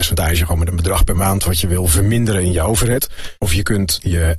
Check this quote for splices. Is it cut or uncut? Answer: cut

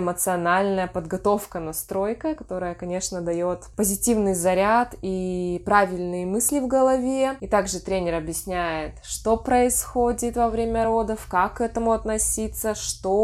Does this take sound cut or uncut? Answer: uncut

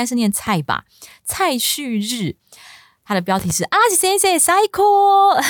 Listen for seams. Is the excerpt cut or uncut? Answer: uncut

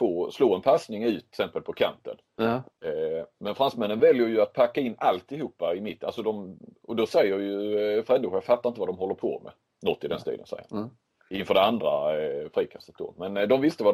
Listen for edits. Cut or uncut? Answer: uncut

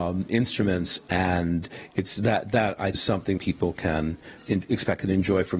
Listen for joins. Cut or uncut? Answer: cut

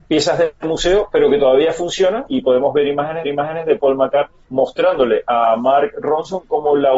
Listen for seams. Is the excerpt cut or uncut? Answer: cut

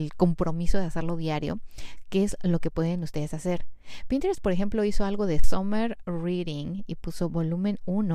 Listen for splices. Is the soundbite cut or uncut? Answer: uncut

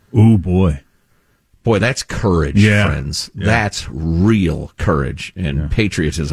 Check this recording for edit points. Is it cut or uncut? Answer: uncut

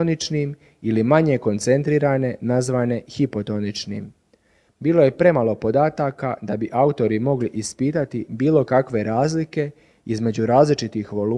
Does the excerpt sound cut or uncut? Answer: uncut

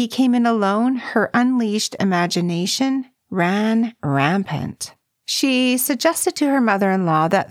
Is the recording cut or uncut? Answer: cut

